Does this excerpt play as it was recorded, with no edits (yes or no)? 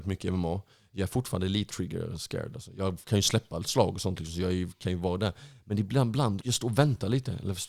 no